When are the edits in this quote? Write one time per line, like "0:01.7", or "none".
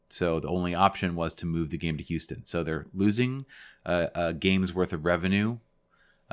none